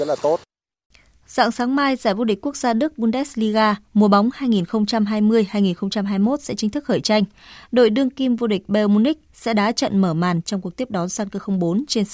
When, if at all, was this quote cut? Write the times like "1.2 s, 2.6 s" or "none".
none